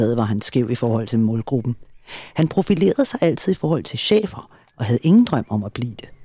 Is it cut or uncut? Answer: uncut